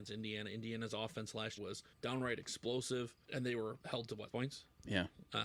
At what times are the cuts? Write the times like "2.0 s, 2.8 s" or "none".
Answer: 1.6 s, 1.9 s, 3.2 s, 3.8 s, 4.3 s

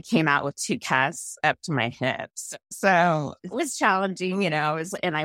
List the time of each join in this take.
3.5 s

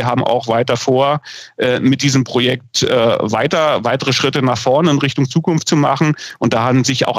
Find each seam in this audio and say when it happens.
none

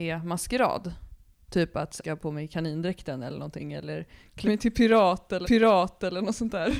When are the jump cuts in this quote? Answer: 2.0 s, 4.4 s, 5.4 s

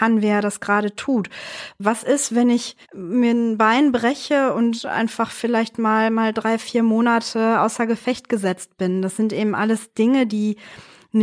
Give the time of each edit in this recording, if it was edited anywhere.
2.8 s

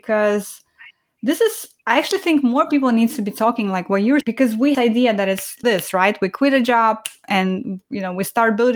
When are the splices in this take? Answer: 1.8 s, 4.2 s, 4.7 s, 5.6 s

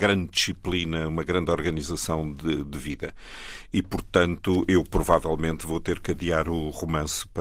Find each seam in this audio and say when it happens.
none

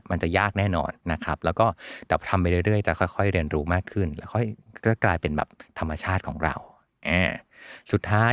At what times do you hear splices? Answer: 1.0 s

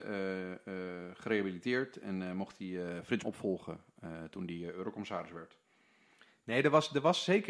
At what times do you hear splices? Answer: 3.2 s

